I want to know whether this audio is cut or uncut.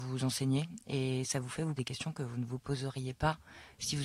cut